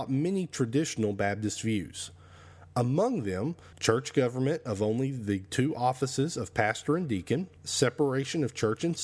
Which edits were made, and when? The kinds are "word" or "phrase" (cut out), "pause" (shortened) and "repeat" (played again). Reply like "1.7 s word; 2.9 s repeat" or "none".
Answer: 3.7 s pause; 7.6 s pause